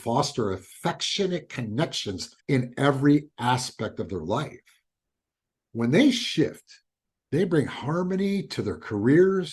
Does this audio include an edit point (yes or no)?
yes